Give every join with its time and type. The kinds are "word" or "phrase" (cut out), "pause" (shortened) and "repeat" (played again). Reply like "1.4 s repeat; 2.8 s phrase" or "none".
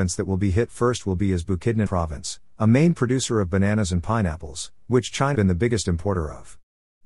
1.9 s word; 5.3 s word